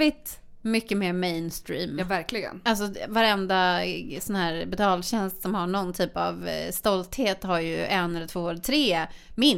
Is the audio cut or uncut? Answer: uncut